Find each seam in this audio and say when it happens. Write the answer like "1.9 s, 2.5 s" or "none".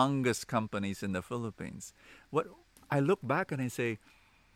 none